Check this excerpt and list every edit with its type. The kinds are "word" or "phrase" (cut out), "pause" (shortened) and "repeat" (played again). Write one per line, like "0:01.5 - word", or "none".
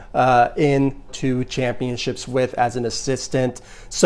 0:01.1 - phrase